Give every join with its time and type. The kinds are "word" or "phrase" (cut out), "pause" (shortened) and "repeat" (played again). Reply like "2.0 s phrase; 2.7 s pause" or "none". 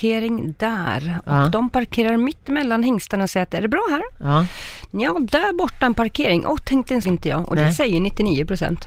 7.0 s word